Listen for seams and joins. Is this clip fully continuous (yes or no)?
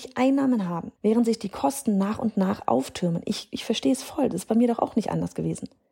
no